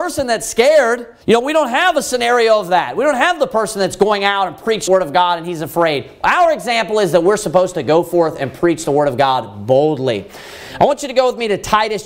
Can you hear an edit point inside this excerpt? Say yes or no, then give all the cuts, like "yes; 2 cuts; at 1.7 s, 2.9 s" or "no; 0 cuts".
yes; 2 cuts; at 1.2 s, 4.9 s